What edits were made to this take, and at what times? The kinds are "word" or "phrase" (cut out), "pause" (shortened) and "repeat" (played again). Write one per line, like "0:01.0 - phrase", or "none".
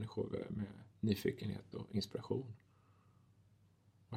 none

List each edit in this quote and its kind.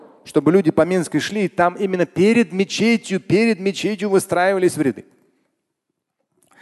none

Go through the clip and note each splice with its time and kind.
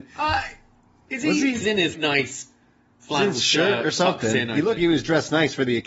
0:01.6 - word
0:01.9 - word
0:04.8 - word

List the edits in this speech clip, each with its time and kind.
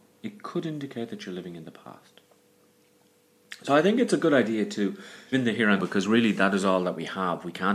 0:05.3 - word
0:05.8 - word

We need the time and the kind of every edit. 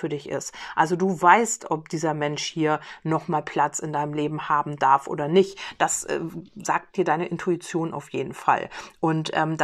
none

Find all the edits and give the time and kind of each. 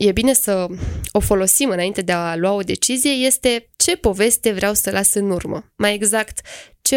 0:03.7 - pause

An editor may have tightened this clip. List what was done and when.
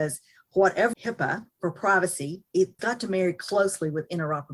0:00.9 - phrase
0:02.8 - word

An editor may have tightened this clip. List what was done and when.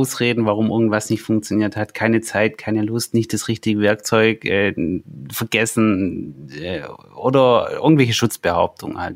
none

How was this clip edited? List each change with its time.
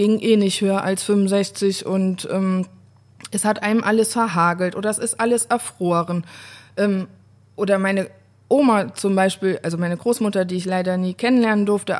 none

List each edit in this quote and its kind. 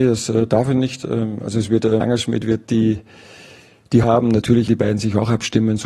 0:02.0 - word
0:04.0 - word
0:04.7 - word

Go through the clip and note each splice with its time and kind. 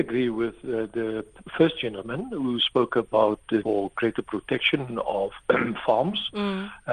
0:03.6 - word

